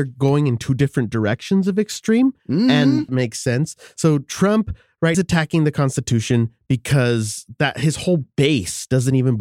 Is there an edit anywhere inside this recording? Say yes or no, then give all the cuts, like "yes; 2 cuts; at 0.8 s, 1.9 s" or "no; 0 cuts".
yes; 3 cuts; at 2.4 s, 3.1 s, 5.1 s